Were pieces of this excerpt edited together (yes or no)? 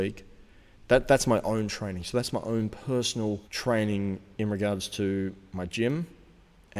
yes